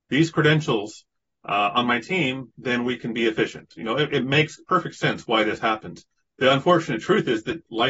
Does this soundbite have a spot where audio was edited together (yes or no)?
no